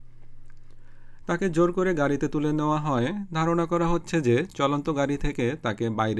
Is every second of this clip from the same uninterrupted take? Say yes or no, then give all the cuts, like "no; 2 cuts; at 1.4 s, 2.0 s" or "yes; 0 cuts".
yes; 0 cuts